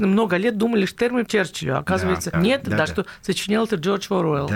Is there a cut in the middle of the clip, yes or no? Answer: yes